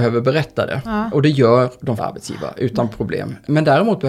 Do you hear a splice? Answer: yes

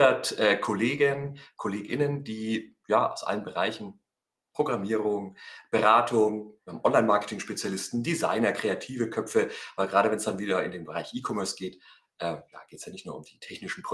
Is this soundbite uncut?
yes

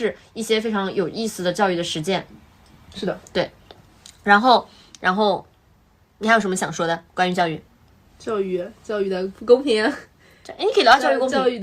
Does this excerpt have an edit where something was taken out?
yes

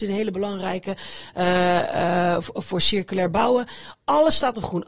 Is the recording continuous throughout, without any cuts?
yes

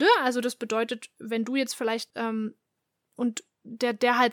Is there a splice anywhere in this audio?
yes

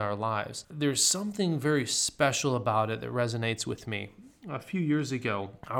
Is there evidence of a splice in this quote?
no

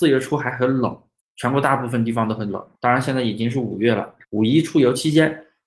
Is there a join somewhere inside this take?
yes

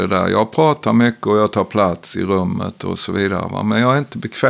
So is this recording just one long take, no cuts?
yes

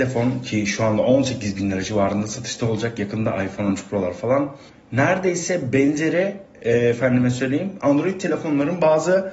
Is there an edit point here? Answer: no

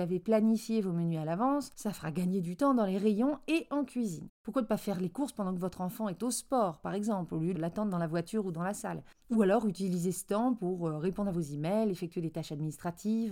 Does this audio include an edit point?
no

